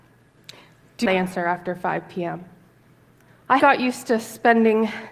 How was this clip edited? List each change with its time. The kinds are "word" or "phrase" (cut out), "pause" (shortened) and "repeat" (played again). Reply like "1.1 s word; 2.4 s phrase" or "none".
1.1 s word; 3.6 s word